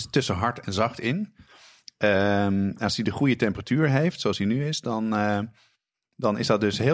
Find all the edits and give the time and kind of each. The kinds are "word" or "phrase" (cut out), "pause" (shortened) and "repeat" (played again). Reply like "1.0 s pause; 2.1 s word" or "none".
none